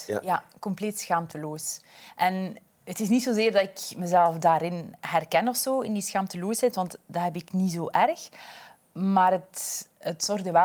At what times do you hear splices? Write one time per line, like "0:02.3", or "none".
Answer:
none